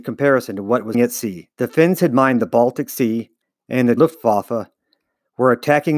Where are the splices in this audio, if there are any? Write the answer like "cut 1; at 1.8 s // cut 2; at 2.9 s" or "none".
cut 1; at 0.9 s // cut 2; at 1.5 s // cut 3; at 3.4 s // cut 4; at 4.0 s